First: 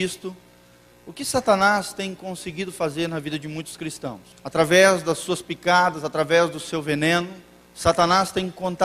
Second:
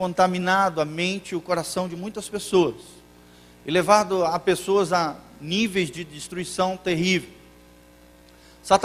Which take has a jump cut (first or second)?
first